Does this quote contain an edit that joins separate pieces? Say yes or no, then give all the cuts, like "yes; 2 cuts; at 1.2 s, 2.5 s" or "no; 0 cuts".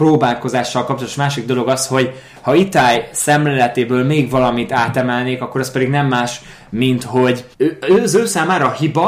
yes; 1 cut; at 7.5 s